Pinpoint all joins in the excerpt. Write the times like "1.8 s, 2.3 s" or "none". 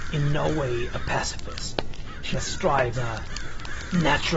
2.3 s, 2.9 s